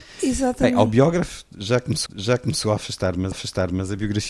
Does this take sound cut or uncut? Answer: cut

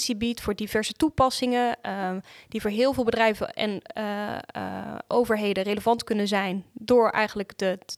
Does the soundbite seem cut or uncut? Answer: uncut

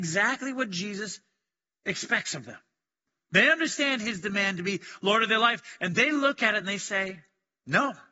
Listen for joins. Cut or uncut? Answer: uncut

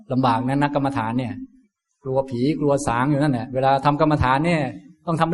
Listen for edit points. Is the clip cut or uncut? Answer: uncut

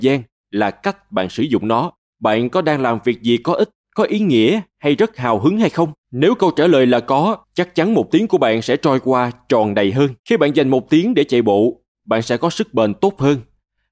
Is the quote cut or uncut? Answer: cut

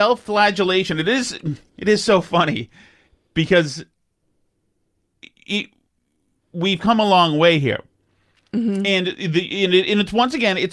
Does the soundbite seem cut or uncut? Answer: uncut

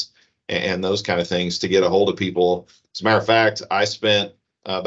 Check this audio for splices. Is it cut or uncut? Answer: uncut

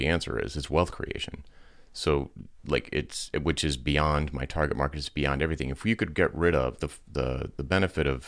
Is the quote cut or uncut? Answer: cut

